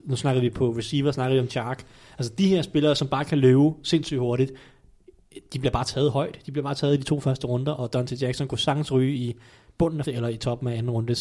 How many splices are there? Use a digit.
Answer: 2